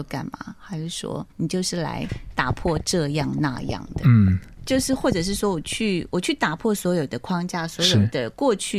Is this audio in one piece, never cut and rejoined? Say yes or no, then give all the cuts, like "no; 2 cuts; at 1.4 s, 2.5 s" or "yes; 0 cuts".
no; 1 cut; at 1.3 s